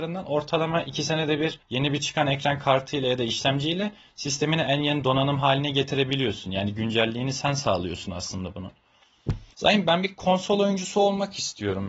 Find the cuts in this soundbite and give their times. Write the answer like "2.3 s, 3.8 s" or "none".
9.5 s